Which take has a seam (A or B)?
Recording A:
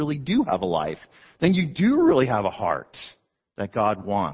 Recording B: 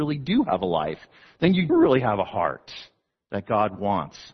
B